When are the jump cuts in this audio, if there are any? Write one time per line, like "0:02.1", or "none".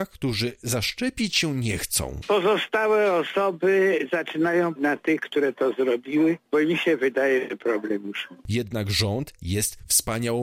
0:04.8